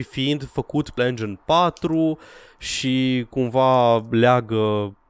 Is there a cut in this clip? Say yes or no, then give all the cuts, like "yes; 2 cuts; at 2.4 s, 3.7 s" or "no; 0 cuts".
yes; 1 cut; at 1.0 s